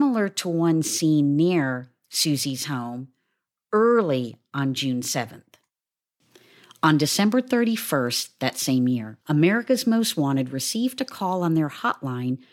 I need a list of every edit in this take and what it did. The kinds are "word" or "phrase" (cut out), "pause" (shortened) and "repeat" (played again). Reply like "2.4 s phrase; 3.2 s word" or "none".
9.2 s pause